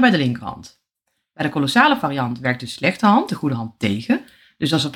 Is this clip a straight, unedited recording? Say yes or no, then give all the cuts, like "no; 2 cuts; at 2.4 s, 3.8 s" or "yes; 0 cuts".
yes; 0 cuts